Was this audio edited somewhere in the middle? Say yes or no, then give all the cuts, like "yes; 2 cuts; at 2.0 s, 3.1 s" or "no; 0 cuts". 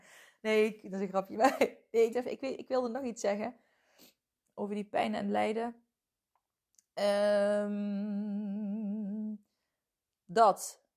yes; 1 cut; at 2.1 s